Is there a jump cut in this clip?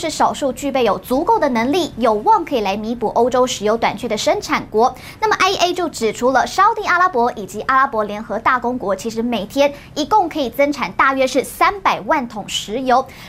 no; 0 cuts

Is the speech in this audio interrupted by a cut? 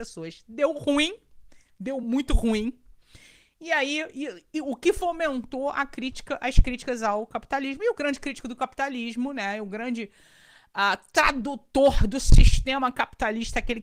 no; 0 cuts

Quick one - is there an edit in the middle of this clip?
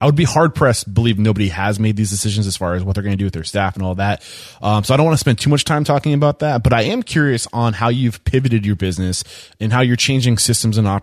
no; 0 cuts

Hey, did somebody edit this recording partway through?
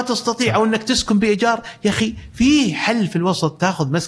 no; 0 cuts

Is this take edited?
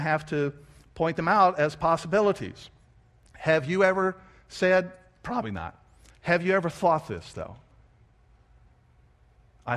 no; 0 cuts

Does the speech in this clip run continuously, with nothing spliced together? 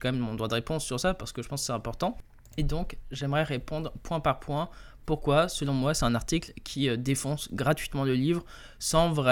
yes; 0 cuts

